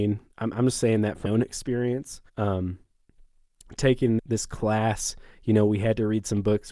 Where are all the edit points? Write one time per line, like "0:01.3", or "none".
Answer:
0:01.2
0:02.3
0:04.2